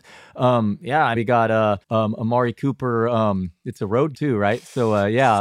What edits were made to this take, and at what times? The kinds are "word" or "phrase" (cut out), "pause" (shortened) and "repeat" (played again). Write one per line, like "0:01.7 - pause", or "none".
0:01.1 - word
0:01.8 - pause
0:04.1 - word

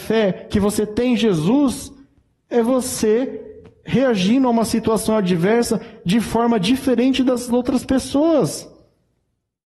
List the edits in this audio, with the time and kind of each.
none

